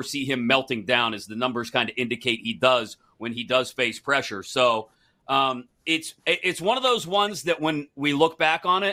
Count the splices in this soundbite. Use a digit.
1